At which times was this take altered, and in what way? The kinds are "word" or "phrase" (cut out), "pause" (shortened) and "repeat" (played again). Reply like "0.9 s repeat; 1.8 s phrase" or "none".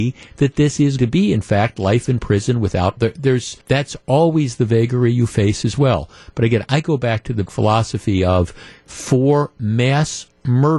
1.0 s word; 3.0 s word; 3.6 s pause; 7.5 s word